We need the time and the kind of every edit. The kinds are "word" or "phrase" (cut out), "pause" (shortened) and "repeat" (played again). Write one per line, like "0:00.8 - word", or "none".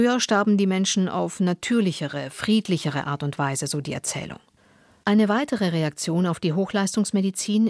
none

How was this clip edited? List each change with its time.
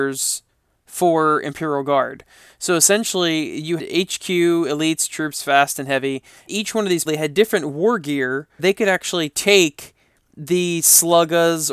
0:03.8 - word
0:06.5 - word
0:07.1 - word
0:08.6 - word

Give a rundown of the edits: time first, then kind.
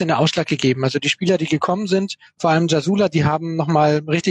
none

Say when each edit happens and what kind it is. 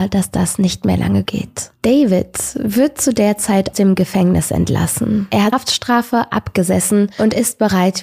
0:01.3 - word
0:03.7 - word
0:05.5 - word

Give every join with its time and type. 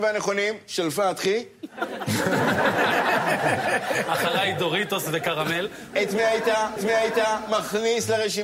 0:06.8 - repeat

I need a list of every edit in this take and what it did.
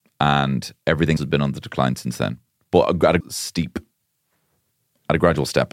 0:01.2 - word
0:02.5 - pause
0:03.2 - word

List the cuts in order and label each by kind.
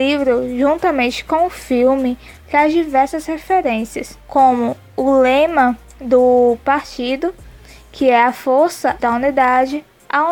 0:09.0 - word

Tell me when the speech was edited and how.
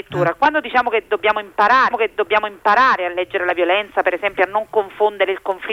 0:01.9 - repeat

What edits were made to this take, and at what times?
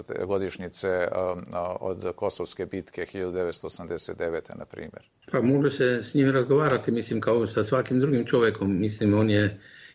none

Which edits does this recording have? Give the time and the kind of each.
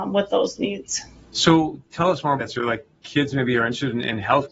0:01.2 - pause
0:02.4 - word

